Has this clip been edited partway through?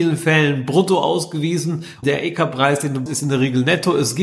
yes; 2 cuts; at 2.0 s, 3.1 s

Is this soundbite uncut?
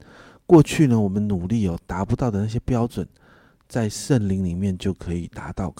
yes; 0 cuts

